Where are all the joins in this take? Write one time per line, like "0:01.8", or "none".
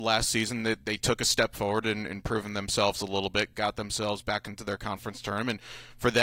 none